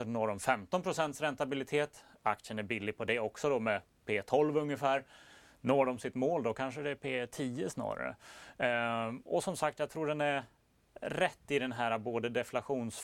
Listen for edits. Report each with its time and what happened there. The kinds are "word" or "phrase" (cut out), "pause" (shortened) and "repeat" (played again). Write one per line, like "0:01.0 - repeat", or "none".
none